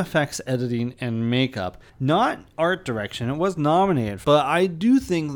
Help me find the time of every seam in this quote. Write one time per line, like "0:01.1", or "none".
0:01.9
0:04.2